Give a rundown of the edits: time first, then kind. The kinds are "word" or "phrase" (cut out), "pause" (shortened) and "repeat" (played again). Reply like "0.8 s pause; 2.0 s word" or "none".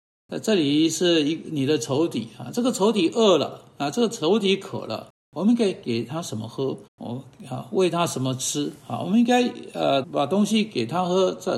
6.9 s pause; 8.8 s pause; 10.0 s word